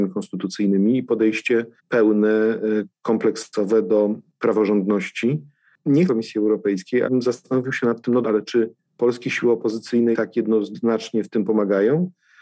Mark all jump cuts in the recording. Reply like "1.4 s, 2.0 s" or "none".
1.8 s, 6.1 s, 7.0 s, 8.2 s, 10.1 s